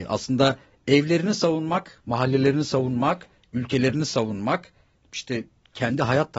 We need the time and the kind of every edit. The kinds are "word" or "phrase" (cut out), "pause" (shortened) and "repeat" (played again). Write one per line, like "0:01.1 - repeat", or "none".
none